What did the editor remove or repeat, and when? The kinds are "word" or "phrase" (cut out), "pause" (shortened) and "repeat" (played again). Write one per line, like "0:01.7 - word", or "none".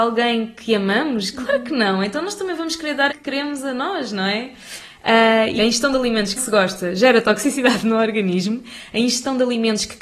0:03.1 - word
0:05.6 - word
0:06.4 - word